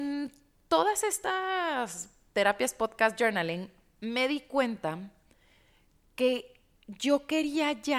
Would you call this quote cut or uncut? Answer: uncut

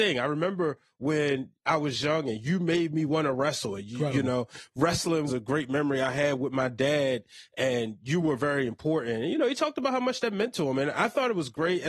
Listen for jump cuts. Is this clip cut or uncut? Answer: cut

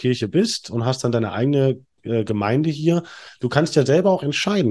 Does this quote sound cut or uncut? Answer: uncut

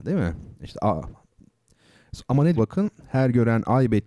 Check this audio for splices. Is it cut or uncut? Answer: cut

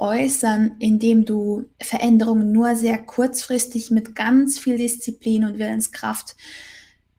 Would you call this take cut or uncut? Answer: cut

